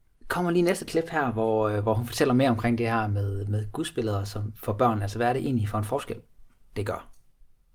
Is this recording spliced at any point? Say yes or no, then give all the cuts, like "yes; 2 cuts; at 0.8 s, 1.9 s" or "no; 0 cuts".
no; 0 cuts